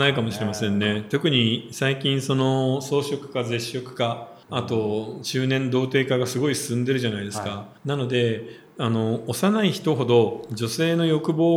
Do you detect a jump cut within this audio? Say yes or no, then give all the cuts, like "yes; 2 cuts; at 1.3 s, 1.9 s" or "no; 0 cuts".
yes; 2 cuts; at 4.4 s, 7.8 s